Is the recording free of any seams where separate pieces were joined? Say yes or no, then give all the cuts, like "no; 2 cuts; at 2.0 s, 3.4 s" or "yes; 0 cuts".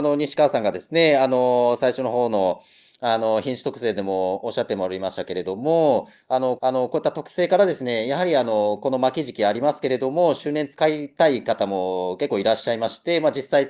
no; 1 cut; at 6.6 s